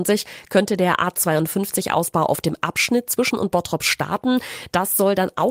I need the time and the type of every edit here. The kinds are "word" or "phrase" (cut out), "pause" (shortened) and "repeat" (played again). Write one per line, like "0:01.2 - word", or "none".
0:03.3 - word